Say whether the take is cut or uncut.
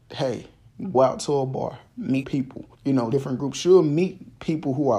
cut